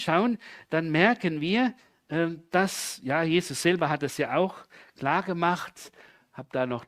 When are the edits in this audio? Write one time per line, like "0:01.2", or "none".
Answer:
none